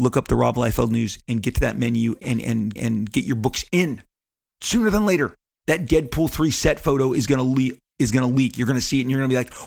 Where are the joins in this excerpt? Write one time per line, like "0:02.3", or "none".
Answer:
0:02.2
0:02.8

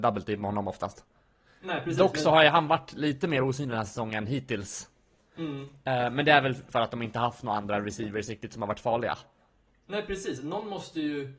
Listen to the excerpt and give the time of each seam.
0:06.7

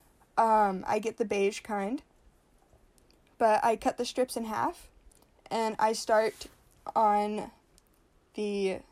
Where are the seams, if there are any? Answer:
none

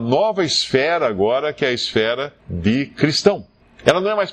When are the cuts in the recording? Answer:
0:02.4

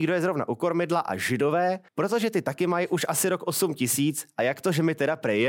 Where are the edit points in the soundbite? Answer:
0:01.9

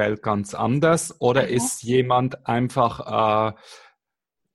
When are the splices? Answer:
none

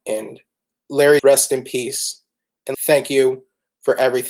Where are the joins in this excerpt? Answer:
0:01.2
0:02.7

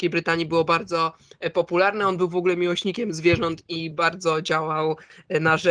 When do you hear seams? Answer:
none

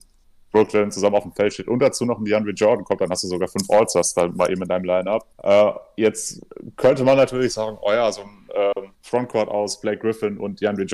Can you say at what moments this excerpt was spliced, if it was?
0:05.3
0:08.9

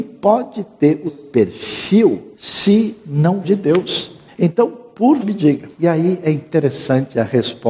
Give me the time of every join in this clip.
0:01.1
0:02.3
0:03.4
0:04.3
0:05.2
0:05.7

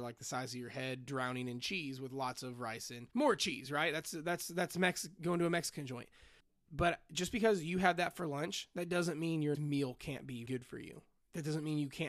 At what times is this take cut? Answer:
0:03.1
0:06.4
0:09.5
0:10.5

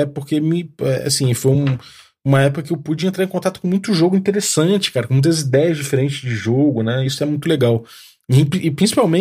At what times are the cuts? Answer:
none

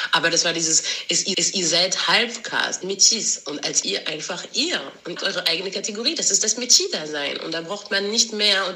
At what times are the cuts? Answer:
0:01.3
0:02.8
0:03.8
0:05.2

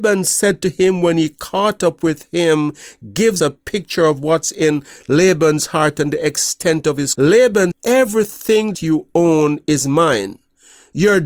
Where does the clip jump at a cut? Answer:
0:03.4
0:07.1
0:07.7
0:08.7

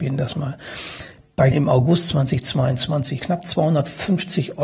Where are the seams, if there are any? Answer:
0:01.5
0:03.2

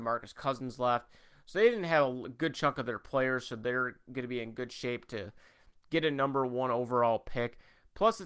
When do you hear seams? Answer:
none

